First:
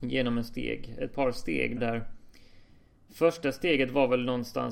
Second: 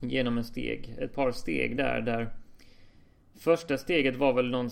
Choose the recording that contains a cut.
first; 1 cut; at 1.8 s

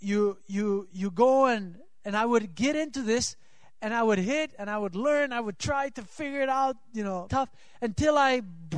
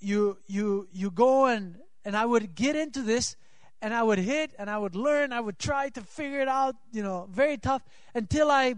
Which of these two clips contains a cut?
first; 1 cut; at 7.3 s

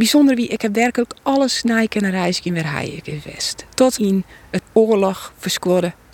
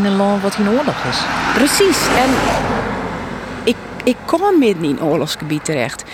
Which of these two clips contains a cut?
first; 2 cuts; at 4.0 s, 4.6 s

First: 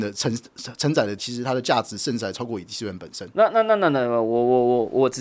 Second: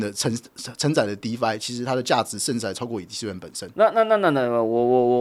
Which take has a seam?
first; 1 cut; at 1.2 s

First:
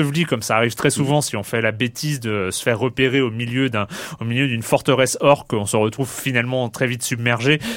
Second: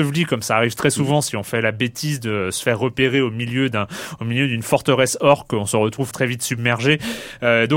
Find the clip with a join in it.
second; 1 cut; at 6.1 s

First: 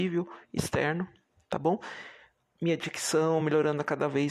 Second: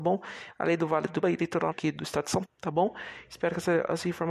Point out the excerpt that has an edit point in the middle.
second; 3 cuts; at 1.2 s, 1.7 s, 2.5 s

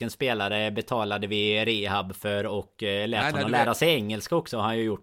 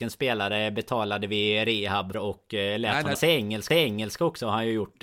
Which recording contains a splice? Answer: second; 3 cuts; at 2.1 s, 3.1 s, 3.7 s

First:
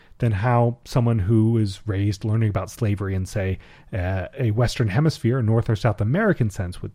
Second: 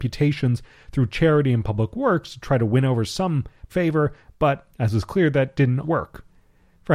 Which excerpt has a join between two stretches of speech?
second; 3 cuts; at 3.7 s, 4.7 s, 5.8 s

